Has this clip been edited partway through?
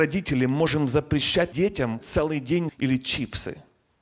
yes; 3 cuts; at 1.5 s, 2.0 s, 2.7 s

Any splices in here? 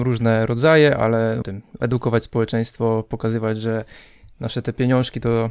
yes; 1 cut; at 1.4 s

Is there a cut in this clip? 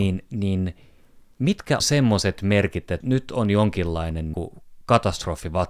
yes; 3 cuts; at 1.8 s, 3.0 s, 4.3 s

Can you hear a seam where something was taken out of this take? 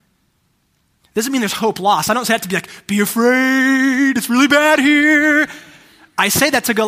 no; 0 cuts

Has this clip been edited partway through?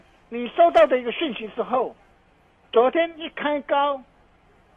no; 0 cuts

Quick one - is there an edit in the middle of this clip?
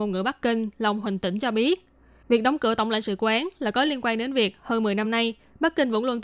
no; 0 cuts

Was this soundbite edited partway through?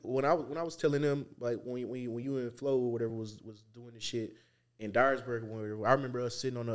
no; 0 cuts

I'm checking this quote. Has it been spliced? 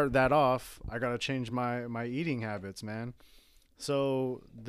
no; 0 cuts

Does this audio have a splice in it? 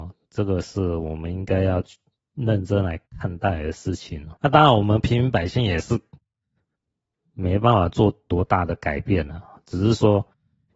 yes; 1 cut; at 4.4 s

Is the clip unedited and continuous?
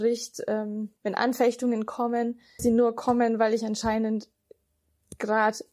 no; 2 cuts; at 1.0 s, 2.6 s

